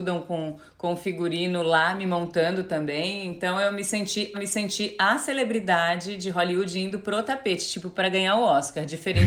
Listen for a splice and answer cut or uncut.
cut